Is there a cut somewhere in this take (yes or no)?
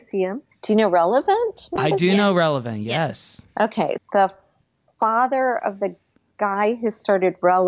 yes